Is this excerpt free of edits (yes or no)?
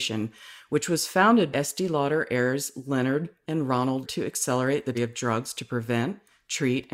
no